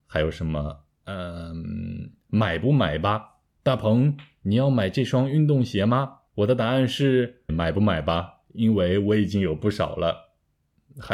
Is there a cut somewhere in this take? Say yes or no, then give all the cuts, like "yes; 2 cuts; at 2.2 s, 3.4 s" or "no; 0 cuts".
yes; 3 cuts; at 3.5 s, 6.3 s, 7.5 s